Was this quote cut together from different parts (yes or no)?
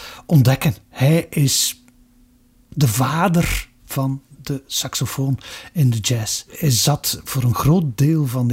no